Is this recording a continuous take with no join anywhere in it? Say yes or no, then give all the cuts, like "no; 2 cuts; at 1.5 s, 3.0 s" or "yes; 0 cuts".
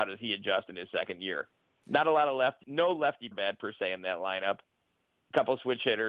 no; 2 cuts; at 2.6 s, 3.3 s